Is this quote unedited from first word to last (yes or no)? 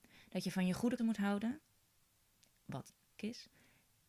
no